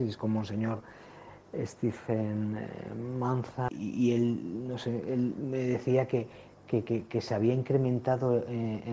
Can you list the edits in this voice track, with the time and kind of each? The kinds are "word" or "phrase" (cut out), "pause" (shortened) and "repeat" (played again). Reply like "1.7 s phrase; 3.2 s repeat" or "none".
none

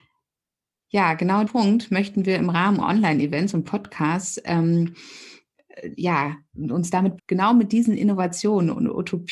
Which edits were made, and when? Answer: 1.5 s word; 2.8 s word; 7.2 s word

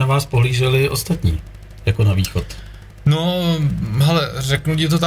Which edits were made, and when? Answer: none

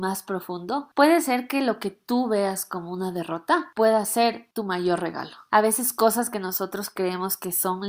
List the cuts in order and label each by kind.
none

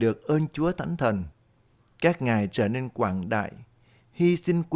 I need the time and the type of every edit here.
none

